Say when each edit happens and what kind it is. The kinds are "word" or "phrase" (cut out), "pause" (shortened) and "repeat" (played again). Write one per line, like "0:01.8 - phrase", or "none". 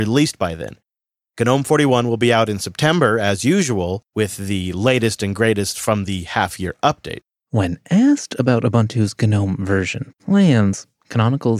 none